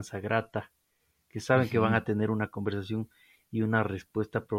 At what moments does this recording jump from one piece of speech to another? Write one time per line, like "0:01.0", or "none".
none

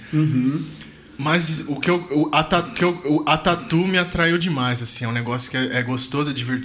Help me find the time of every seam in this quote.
0:02.8

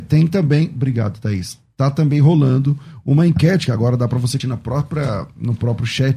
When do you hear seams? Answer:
0:04.4

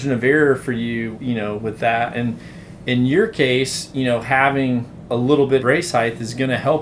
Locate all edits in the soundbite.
0:01.1
0:05.6

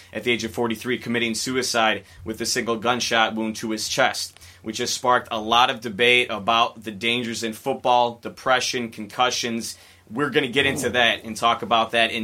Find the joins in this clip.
none

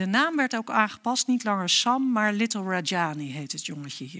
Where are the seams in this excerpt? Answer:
none

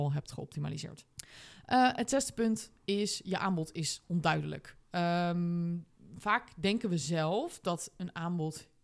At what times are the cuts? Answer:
0:01.1

